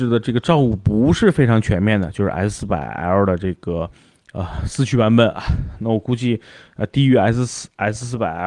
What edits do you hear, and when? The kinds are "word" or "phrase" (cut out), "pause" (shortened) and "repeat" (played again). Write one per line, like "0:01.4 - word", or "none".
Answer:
none